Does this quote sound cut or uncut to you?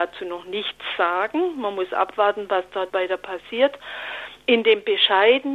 cut